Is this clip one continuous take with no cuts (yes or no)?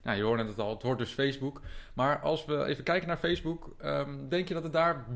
yes